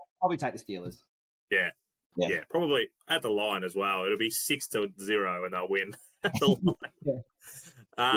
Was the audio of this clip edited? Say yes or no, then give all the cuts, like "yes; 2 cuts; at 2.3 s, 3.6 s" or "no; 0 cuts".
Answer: no; 0 cuts